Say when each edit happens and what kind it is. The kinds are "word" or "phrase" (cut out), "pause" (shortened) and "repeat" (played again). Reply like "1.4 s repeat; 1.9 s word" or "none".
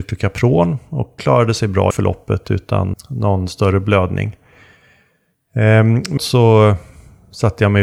1.2 s word; 1.9 s word; 2.9 s word; 6.2 s word